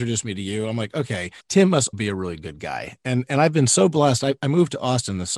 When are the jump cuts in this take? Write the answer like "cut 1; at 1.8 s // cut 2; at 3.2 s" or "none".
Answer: cut 1; at 1.4 s // cut 2; at 1.9 s